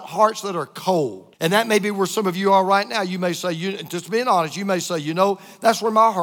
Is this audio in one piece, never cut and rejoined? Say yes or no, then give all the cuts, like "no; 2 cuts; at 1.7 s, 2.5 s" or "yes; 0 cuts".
no; 1 cut; at 1.3 s